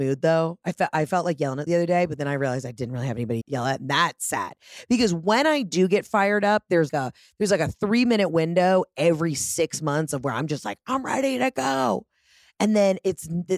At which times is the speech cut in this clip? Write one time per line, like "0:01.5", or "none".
0:01.7
0:03.4
0:06.9

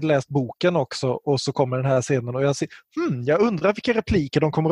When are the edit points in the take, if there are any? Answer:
none

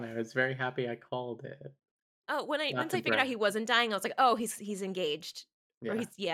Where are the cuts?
none

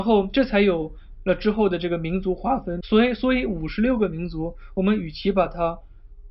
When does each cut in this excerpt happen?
0:02.8

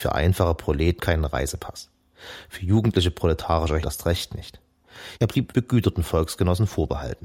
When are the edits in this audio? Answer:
0:01.0
0:03.8
0:05.5

